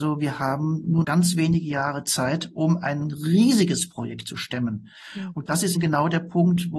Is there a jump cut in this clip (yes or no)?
yes